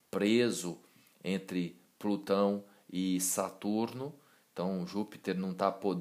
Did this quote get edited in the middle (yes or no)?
no